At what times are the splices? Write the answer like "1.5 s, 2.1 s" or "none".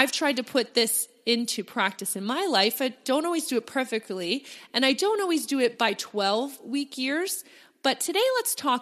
none